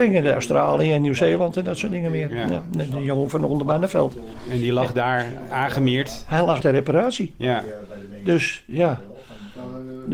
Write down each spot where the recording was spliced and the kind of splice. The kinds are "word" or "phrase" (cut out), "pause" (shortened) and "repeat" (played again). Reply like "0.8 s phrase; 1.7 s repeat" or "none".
5.5 s word; 6.6 s word